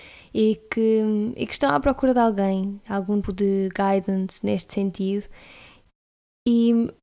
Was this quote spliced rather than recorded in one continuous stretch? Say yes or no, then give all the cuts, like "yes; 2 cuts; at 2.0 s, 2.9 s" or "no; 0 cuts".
yes; 1 cut; at 3.2 s